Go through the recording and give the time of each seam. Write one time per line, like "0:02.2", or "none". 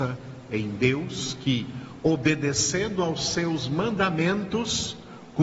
none